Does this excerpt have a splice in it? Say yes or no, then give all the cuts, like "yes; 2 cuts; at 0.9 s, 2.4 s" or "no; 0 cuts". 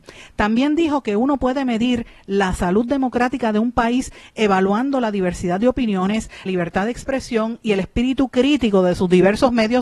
yes; 1 cut; at 6.5 s